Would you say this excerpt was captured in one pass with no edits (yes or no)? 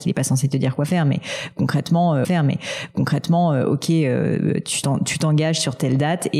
no